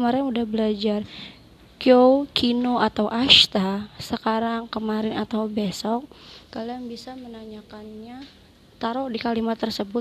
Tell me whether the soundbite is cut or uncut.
uncut